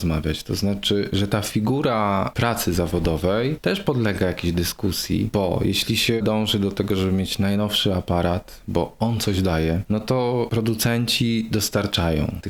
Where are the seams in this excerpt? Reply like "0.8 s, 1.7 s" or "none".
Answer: 6.2 s